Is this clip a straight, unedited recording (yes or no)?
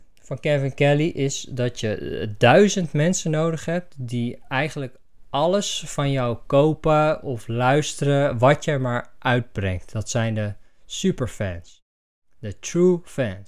yes